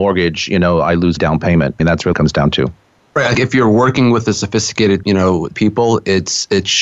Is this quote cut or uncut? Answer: cut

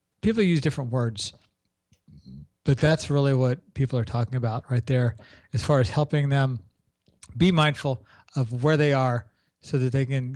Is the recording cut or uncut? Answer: uncut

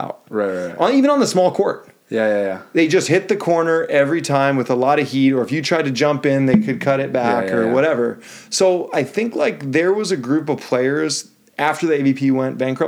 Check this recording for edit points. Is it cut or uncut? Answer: uncut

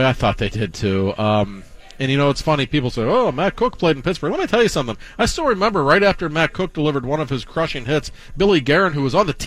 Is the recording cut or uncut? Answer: uncut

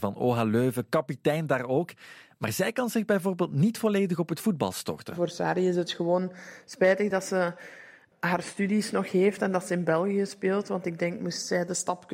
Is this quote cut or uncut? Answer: uncut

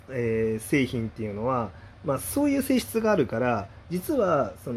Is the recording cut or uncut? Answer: uncut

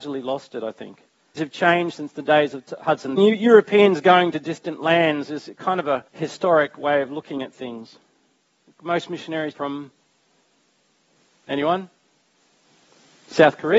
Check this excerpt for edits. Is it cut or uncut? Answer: cut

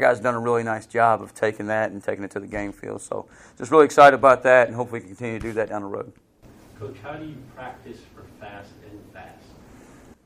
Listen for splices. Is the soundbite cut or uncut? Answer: uncut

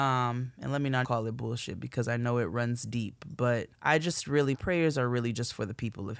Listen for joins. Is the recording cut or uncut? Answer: cut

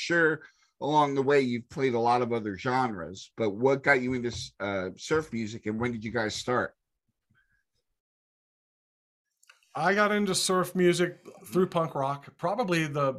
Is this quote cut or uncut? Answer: uncut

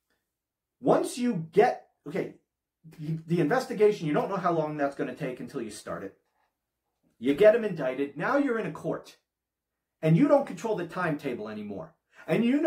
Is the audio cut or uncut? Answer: uncut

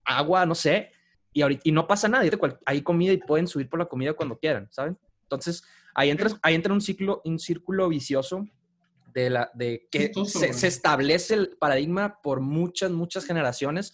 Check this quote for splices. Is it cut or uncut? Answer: cut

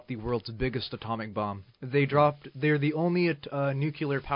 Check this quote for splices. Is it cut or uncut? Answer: cut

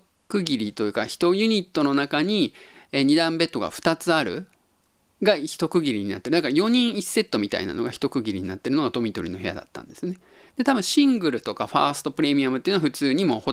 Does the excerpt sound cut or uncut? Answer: uncut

